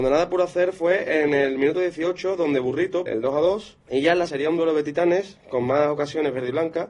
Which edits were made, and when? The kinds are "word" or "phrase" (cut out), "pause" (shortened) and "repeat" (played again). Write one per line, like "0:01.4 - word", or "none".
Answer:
0:03.1 - phrase
0:03.8 - pause
0:04.3 - phrase

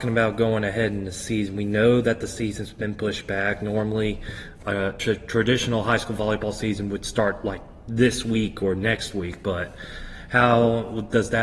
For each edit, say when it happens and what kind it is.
none

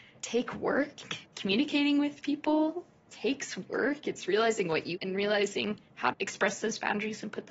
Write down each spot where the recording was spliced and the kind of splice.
0:01.2 - pause
0:04.9 - word
0:06.1 - word

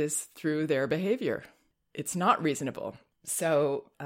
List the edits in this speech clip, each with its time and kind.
none

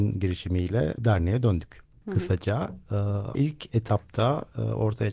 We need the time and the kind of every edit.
0:01.0 - word
0:02.0 - word
0:03.3 - word

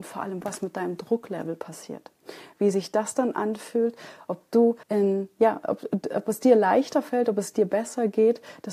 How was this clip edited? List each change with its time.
0:04.8 - pause

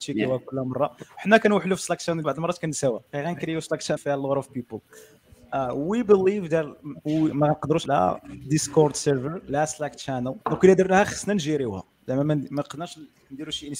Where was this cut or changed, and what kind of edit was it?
0:02.2 - word
0:03.1 - pause
0:04.0 - word
0:07.9 - word
0:10.4 - pause

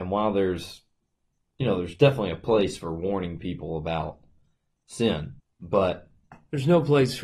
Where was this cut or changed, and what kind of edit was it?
0:05.4 - pause

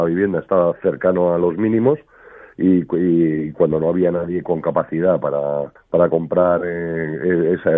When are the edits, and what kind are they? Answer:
0:04.4 - word
0:05.8 - pause

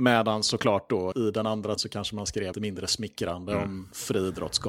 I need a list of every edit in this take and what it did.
0:01.1 - word
0:01.8 - word
0:02.5 - word

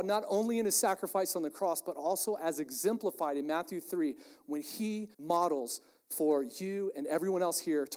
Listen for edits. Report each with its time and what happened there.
0:05.1 - pause

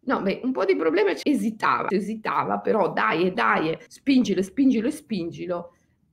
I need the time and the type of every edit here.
0:01.2 - word
0:01.9 - word
0:03.3 - word
0:03.9 - pause

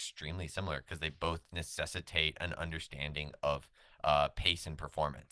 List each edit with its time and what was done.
none

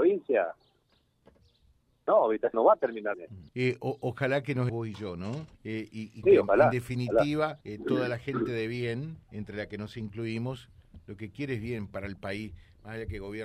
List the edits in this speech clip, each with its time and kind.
0:02.5 - word
0:03.1 - word
0:03.5 - pause
0:04.7 - word
0:05.5 - pause
0:06.2 - word
0:07.6 - pause
0:09.2 - pause

